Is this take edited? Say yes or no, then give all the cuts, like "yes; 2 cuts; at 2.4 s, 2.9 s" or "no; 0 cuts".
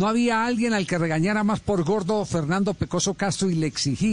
no; 0 cuts